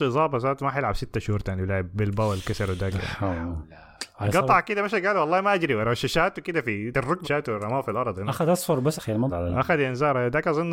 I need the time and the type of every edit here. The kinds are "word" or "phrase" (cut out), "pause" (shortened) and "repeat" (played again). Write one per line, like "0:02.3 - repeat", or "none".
0:06.9 - word
0:07.2 - word
0:09.0 - word
0:09.3 - word